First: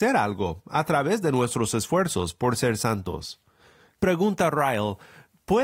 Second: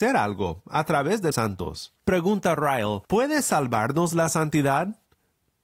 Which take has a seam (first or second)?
second